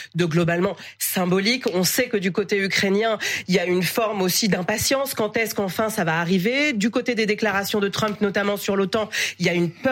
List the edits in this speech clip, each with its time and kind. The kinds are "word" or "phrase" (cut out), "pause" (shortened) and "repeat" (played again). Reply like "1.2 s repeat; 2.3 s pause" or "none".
none